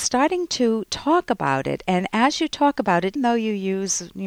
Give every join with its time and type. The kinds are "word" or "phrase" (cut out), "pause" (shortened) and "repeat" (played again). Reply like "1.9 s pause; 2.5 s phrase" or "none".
3.2 s word